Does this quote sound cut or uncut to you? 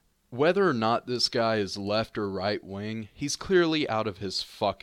uncut